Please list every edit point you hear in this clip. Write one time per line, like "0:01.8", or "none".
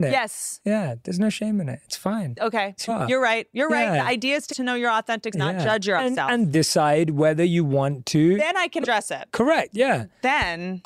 0:02.9
0:04.5
0:05.3
0:06.0
0:06.5
0:08.8